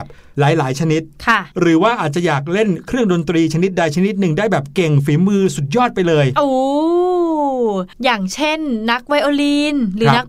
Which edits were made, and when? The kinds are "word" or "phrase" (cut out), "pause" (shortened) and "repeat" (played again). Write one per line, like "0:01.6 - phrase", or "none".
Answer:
0:07.9 - pause